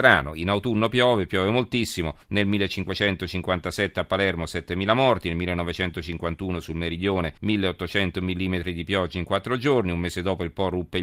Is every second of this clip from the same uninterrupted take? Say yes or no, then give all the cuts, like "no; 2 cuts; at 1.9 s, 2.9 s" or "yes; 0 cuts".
no; 2 cuts; at 2.2 s, 7.4 s